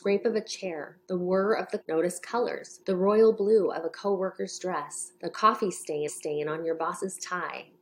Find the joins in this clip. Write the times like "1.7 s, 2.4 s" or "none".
1.0 s, 1.8 s, 2.8 s, 5.2 s, 6.1 s